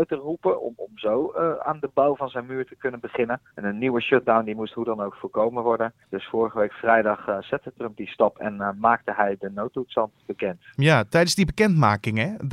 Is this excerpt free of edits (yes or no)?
no